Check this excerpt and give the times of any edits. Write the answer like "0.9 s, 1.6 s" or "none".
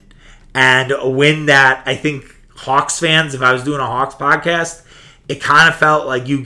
none